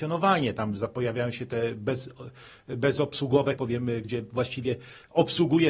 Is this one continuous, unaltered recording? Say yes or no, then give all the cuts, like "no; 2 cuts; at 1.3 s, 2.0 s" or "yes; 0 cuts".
no; 2 cuts; at 3.6 s, 4.0 s